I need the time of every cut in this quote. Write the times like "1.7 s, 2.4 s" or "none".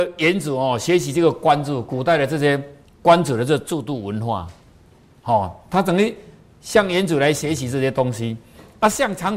none